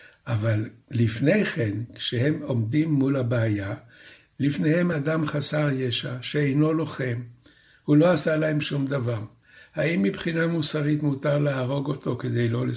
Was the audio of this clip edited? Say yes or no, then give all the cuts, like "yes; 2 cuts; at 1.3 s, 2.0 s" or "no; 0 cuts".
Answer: no; 0 cuts